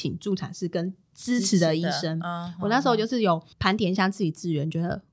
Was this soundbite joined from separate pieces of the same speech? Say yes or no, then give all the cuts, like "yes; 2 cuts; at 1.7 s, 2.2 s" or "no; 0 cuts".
yes; 2 cuts; at 1.0 s, 3.5 s